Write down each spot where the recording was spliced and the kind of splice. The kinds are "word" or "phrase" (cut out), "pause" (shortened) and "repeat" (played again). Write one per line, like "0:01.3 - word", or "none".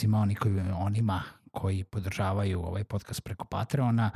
none